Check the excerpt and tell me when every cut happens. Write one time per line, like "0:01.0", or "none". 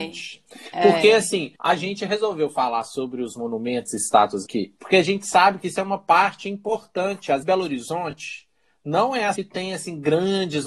0:01.6
0:04.5
0:04.8
0:07.4
0:09.4